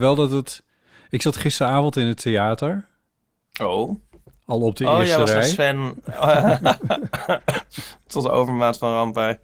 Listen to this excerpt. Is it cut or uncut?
uncut